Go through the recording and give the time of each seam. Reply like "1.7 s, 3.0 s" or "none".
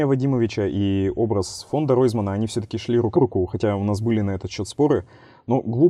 3.1 s